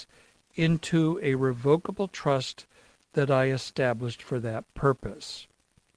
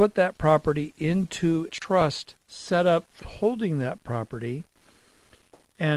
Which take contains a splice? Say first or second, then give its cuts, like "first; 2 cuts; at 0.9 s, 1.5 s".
second; 3 cuts; at 1.7 s, 2.4 s, 3.2 s